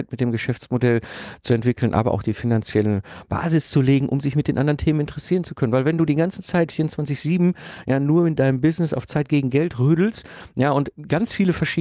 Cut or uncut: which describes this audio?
uncut